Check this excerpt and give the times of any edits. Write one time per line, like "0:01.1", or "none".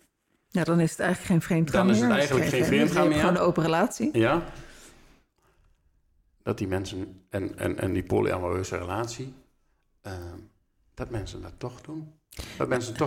none